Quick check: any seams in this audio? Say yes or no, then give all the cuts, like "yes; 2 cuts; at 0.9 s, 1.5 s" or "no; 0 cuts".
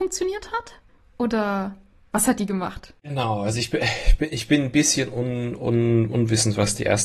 no; 0 cuts